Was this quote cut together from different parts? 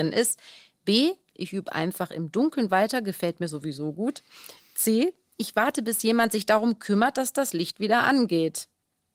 no; 0 cuts

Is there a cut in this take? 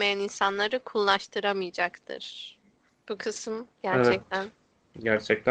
yes; 2 cuts; at 2.9 s, 3.7 s

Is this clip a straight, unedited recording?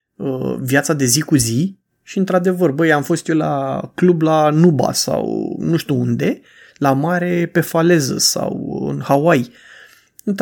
yes; 0 cuts

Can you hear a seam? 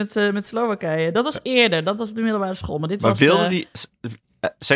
no; 0 cuts

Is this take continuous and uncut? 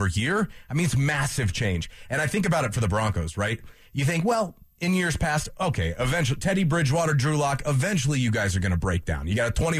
yes; 0 cuts

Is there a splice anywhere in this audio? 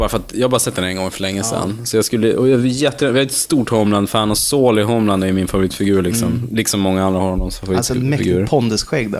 no; 0 cuts

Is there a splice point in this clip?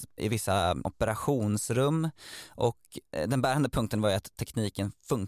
no; 0 cuts

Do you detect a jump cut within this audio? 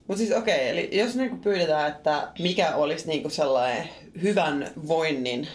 no; 0 cuts

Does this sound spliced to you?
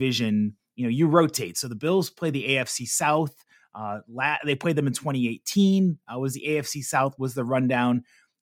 no; 0 cuts

